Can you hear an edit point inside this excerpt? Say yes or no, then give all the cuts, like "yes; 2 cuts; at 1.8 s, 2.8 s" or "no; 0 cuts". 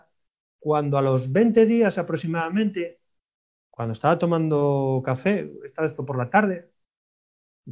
no; 0 cuts